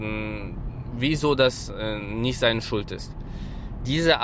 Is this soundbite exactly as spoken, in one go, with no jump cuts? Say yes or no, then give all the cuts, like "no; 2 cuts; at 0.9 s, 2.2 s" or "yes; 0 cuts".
yes; 0 cuts